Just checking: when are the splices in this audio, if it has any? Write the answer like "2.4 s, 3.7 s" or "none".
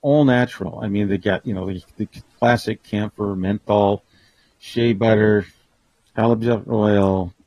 none